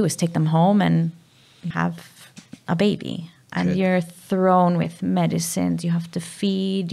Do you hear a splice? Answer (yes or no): yes